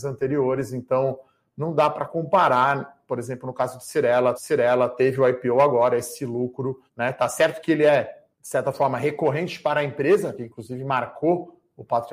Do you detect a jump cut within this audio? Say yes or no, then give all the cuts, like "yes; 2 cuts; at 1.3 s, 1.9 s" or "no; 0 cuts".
yes; 4 cuts; at 4.3 s, 6.9 s, 8.3 s, 10.4 s